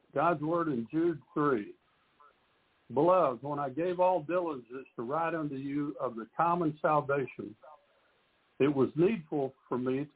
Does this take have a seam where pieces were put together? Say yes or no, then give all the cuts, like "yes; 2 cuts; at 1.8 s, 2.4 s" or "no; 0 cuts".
no; 0 cuts